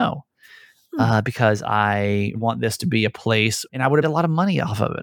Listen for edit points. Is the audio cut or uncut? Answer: cut